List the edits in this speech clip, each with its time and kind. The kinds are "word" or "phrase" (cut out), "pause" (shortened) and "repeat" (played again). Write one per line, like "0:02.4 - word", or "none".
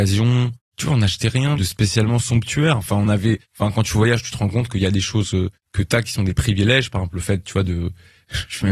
none